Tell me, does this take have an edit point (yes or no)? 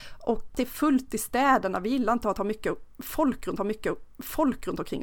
yes